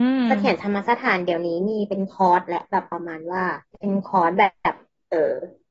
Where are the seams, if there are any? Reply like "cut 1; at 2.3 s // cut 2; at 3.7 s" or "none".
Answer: cut 1; at 3.7 s